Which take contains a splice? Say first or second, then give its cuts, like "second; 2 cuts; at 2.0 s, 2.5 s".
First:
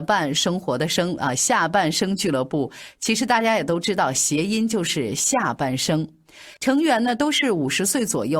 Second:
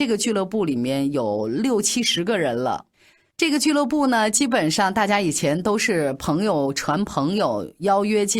first; 1 cut; at 6.6 s